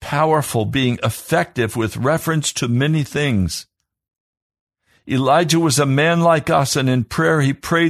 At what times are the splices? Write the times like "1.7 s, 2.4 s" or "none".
none